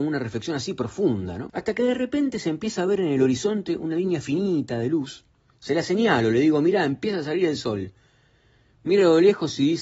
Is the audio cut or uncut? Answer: uncut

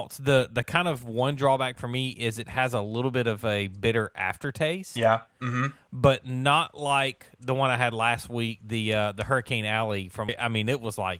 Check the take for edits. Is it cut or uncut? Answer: cut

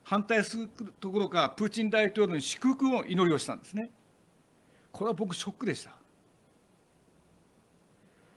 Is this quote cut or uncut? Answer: uncut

